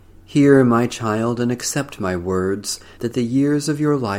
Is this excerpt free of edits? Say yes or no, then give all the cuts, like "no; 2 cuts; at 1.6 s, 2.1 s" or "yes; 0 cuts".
yes; 0 cuts